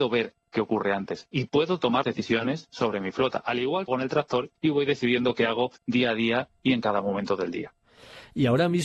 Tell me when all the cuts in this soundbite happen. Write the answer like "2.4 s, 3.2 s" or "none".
2.0 s, 3.9 s, 4.6 s, 5.8 s